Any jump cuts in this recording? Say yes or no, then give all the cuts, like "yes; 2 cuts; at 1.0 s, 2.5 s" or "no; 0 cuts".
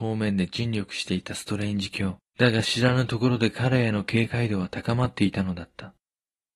yes; 1 cut; at 2.3 s